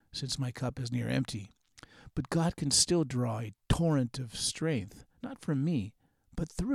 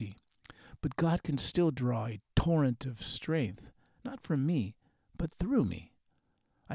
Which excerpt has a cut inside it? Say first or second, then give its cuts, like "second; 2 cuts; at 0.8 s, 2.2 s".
first; 1 cut; at 5.1 s